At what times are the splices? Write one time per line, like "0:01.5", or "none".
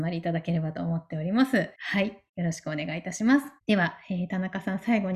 0:01.7
0:02.3
0:03.6